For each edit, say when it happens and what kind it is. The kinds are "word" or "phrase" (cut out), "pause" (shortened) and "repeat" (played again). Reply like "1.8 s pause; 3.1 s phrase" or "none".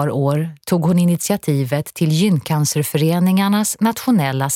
none